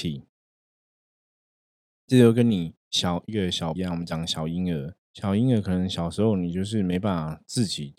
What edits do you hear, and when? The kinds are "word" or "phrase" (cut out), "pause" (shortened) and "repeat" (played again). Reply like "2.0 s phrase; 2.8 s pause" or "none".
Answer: 2.8 s pause; 3.8 s word; 5.0 s pause